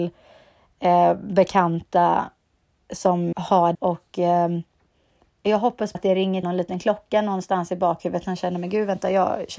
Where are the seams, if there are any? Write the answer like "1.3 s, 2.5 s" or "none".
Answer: 3.3 s, 3.7 s, 5.9 s, 6.4 s